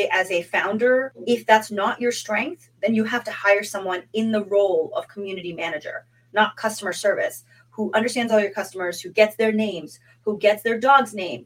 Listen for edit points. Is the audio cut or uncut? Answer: uncut